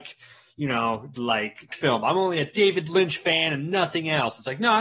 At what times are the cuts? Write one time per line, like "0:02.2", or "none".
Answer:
0:01.7